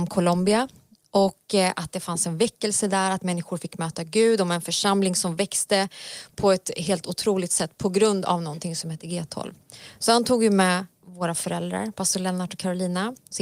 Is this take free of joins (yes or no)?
yes